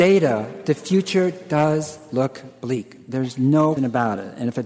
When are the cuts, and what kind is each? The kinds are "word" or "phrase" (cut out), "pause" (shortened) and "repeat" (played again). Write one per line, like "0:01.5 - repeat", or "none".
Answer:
0:03.8 - word